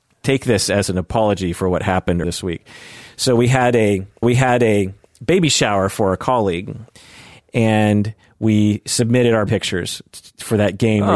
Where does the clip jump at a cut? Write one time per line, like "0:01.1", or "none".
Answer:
0:02.2
0:04.2
0:09.5